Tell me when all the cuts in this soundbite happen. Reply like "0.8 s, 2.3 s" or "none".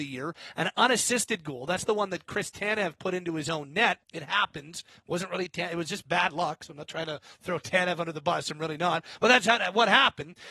4.0 s